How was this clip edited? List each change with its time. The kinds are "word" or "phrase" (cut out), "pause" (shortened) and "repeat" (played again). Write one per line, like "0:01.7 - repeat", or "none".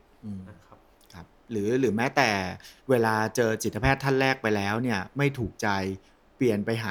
0:02.8 - pause